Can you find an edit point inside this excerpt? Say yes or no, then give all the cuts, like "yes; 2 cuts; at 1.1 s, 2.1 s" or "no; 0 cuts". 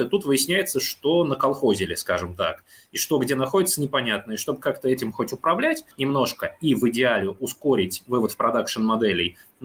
yes; 1 cut; at 5.9 s